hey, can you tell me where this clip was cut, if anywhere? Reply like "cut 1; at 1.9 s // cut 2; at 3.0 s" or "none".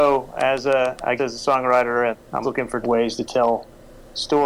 cut 1; at 1.2 s // cut 2; at 2.1 s // cut 3; at 2.4 s // cut 4; at 2.8 s